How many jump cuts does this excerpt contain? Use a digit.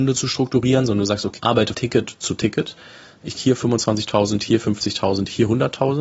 3